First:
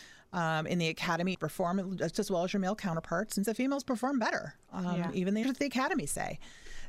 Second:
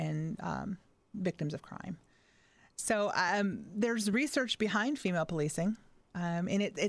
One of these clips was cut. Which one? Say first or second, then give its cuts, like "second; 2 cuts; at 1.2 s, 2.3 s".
first; 4 cuts; at 1.3 s, 2.1 s, 3.4 s, 5.4 s